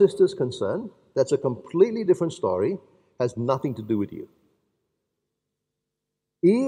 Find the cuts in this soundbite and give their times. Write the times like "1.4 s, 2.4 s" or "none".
none